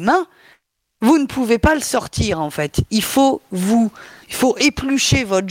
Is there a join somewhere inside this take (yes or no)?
no